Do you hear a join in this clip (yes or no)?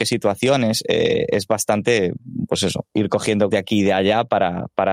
yes